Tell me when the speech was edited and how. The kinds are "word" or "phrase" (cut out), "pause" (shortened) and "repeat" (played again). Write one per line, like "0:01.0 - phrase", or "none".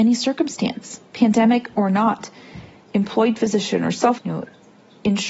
0:01.1 - pause
0:04.2 - phrase